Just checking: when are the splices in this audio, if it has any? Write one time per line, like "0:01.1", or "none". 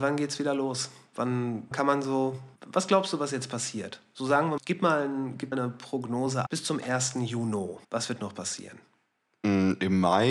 0:01.7
0:02.6
0:04.6
0:05.5
0:06.5
0:07.8